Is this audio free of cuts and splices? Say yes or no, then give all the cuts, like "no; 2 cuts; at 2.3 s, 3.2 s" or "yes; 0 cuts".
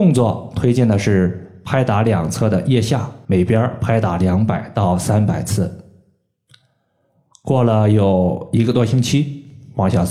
no; 1 cut; at 3.2 s